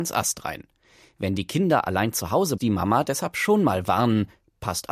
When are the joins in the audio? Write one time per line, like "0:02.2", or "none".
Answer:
0:02.6